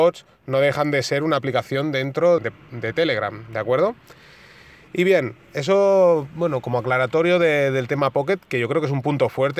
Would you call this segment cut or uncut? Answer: cut